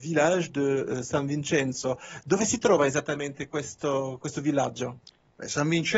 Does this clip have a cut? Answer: no; 0 cuts

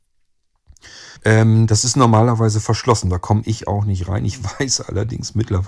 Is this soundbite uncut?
no; 1 cut; at 1.2 s

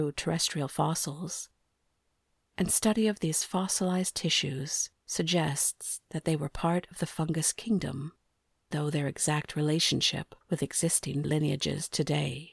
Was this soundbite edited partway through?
yes; 4 cuts; at 5.0 s, 8.7 s, 10.4 s, 11.2 s

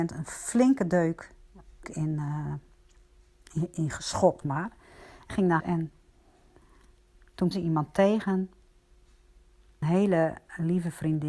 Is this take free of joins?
no; 6 cuts; at 1.8 s, 4.4 s, 5.3 s, 5.6 s, 7.5 s, 9.8 s

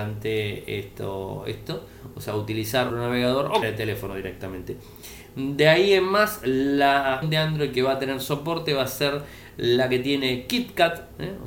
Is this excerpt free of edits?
no; 3 cuts; at 2.9 s, 3.6 s, 7.2 s

